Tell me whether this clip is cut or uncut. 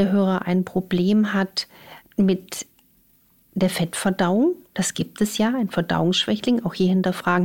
cut